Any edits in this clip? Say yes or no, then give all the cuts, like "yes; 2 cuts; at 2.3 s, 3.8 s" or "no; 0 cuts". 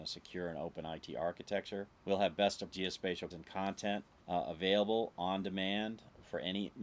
yes; 4 cuts; at 2.0 s, 2.7 s, 3.3 s, 4.2 s